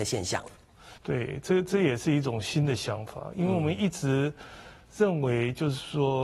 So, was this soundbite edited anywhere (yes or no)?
yes